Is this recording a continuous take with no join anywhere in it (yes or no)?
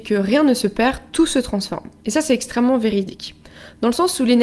yes